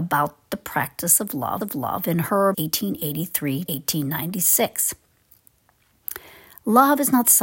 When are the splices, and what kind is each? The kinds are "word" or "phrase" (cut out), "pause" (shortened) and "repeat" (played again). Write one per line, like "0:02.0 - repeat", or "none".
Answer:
0:01.6 - repeat
0:02.5 - phrase
0:03.7 - word